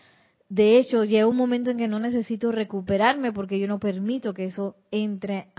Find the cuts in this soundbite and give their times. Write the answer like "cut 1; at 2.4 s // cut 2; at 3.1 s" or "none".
none